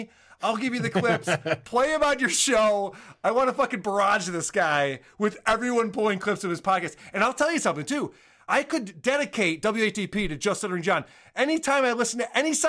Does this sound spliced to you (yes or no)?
no